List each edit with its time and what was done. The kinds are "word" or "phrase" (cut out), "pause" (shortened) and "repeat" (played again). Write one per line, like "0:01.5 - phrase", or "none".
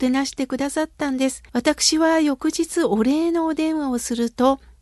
0:01.5 - pause